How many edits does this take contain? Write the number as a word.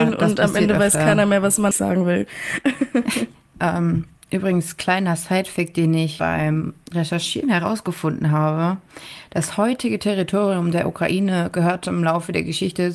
one